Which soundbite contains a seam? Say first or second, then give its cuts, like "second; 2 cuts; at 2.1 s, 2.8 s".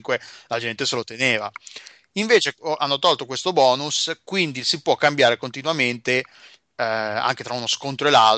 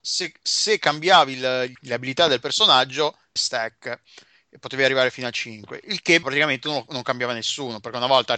second; 3 cuts; at 1.7 s, 3.4 s, 6.2 s